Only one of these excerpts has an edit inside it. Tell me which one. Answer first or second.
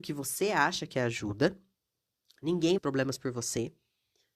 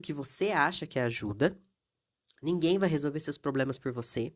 first